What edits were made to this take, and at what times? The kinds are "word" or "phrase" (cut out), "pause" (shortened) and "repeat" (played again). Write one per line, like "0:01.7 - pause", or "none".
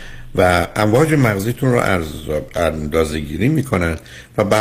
none